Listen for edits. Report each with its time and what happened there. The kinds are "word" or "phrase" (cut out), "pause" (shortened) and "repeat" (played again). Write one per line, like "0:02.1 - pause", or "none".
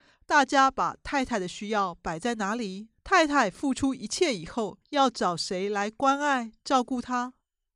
0:03.0 - pause
0:04.8 - pause